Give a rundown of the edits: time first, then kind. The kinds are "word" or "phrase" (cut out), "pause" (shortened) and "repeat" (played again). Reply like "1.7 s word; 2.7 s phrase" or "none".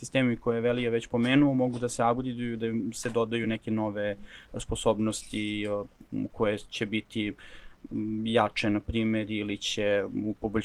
none